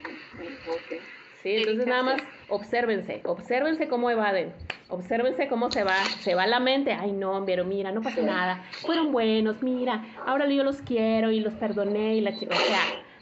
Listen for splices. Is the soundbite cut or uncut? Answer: uncut